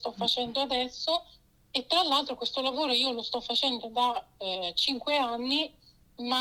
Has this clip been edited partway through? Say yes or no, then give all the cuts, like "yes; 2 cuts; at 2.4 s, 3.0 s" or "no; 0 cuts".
no; 0 cuts